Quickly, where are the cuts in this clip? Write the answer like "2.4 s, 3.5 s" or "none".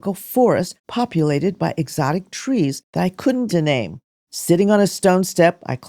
3.5 s